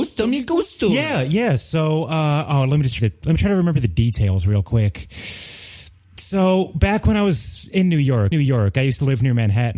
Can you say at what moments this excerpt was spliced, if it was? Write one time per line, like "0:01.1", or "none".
0:03.0
0:08.3